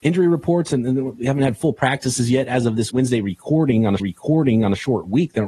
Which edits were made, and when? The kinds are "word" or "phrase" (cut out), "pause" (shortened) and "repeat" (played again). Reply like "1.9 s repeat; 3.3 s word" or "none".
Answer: 2.9 s word; 4.0 s repeat